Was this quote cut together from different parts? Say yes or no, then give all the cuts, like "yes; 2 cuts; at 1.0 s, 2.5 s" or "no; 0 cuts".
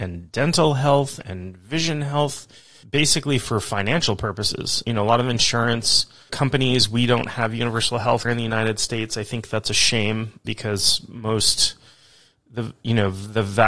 yes; 5 cuts; at 2.8 s, 4.8 s, 6.3 s, 8.2 s, 10.4 s